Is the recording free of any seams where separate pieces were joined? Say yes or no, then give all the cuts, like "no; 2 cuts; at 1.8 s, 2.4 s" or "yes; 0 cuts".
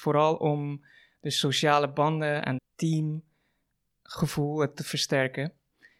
no; 2 cuts; at 2.6 s, 4.7 s